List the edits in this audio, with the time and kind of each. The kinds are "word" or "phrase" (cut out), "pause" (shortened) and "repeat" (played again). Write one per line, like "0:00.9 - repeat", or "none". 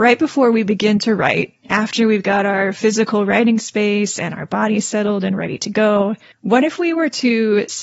0:06.3 - pause